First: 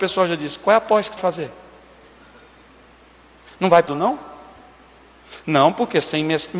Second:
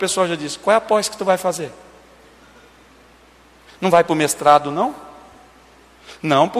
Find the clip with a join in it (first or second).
first